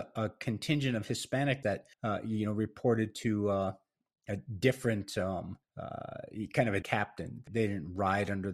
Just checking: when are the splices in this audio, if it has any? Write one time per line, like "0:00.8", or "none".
0:01.6
0:01.9
0:05.6
0:06.8
0:07.5